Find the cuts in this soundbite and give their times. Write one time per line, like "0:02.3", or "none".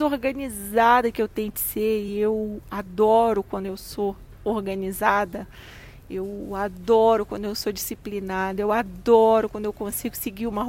none